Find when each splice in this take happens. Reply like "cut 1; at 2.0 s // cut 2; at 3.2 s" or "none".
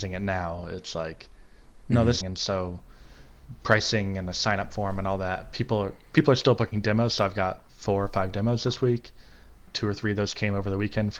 cut 1; at 2.2 s // cut 2; at 7.7 s